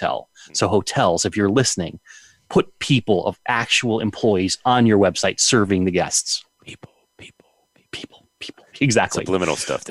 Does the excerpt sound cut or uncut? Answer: uncut